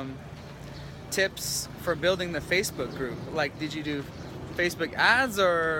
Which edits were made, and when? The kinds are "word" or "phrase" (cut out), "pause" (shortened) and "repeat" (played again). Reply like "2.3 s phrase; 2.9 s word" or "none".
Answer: none